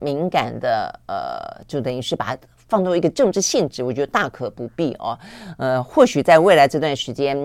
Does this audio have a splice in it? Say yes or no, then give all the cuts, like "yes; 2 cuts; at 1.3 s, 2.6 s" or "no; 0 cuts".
no; 0 cuts